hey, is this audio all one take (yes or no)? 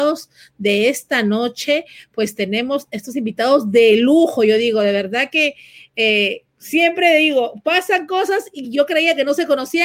yes